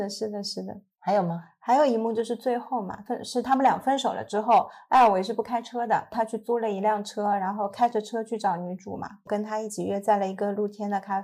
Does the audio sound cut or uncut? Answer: cut